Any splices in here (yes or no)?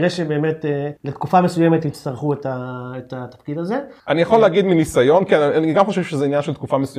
yes